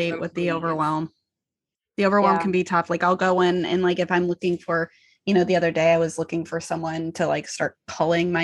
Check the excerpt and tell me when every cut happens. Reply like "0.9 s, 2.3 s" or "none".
none